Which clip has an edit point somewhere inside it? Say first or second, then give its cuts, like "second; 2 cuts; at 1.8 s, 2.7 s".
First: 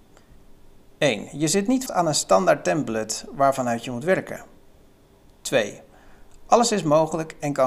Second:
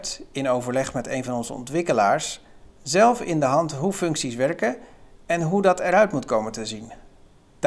first; 1 cut; at 1.9 s